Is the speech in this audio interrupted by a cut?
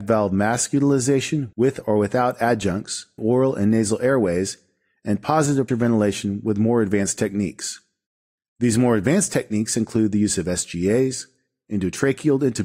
yes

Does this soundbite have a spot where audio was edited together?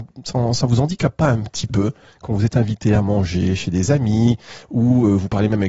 no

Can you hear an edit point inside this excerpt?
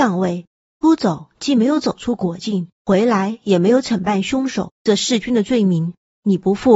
yes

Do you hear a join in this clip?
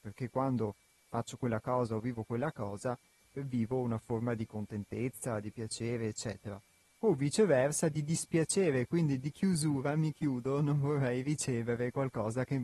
no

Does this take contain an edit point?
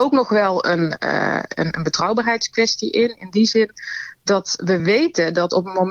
no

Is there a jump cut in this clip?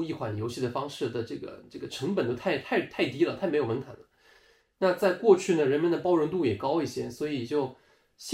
no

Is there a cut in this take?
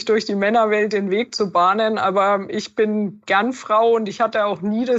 no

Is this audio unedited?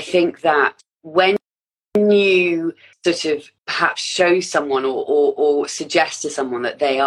no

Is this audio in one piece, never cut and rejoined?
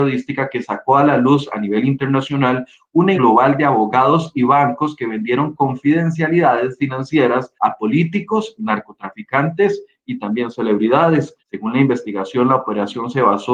no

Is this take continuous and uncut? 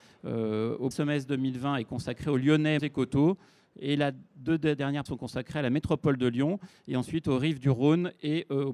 no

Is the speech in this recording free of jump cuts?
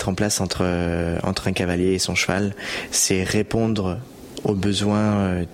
yes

